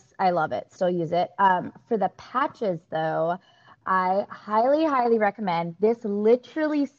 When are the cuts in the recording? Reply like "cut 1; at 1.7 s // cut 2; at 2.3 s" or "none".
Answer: none